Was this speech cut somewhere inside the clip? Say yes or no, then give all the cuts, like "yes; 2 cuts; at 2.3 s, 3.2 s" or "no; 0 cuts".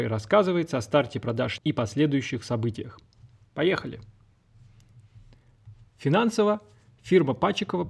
yes; 1 cut; at 1.6 s